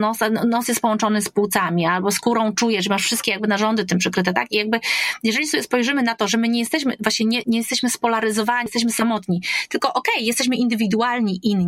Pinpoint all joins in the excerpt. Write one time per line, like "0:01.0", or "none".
0:07.4
0:08.7